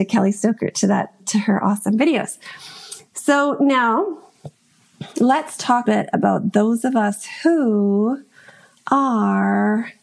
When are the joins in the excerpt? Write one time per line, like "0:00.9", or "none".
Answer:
0:01.2
0:05.1
0:05.9